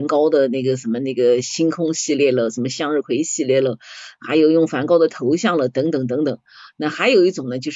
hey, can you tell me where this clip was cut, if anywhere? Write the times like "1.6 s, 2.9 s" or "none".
none